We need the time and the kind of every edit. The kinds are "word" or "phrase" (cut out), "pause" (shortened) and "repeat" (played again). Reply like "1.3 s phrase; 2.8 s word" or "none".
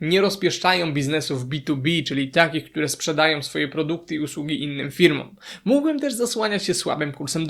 none